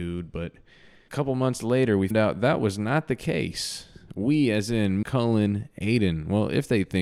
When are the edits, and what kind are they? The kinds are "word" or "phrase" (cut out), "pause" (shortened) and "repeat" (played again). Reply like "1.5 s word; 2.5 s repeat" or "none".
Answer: 1.1 s word; 2.1 s word; 5.0 s word